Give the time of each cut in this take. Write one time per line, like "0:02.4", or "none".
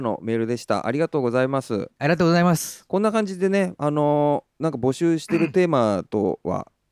0:04.5